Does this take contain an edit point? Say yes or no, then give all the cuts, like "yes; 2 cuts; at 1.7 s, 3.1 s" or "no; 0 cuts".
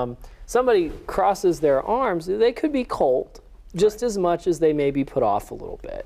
no; 0 cuts